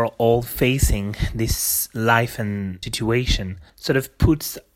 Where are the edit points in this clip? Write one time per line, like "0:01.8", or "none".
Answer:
0:02.8
0:03.7